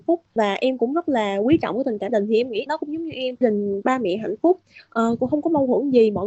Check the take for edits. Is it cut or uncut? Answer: cut